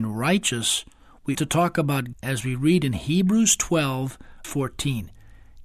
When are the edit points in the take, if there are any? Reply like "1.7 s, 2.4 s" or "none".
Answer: 1.3 s, 2.1 s, 4.4 s